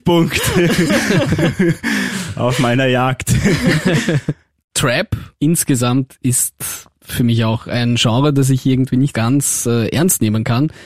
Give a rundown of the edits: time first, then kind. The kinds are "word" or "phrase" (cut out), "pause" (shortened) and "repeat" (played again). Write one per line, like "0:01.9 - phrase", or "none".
0:05.3 - pause
0:09.1 - word